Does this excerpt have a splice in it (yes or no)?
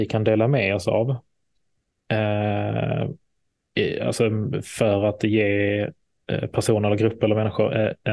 no